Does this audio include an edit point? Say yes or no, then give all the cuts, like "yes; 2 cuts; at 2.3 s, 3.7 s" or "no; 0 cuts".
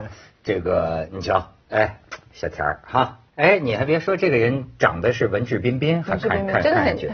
yes; 2 cuts; at 1.6 s, 3.3 s